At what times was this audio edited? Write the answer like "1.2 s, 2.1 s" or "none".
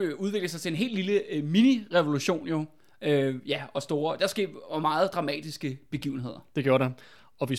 none